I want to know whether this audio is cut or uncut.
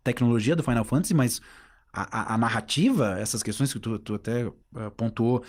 uncut